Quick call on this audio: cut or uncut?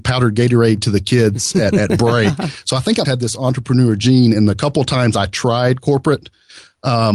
cut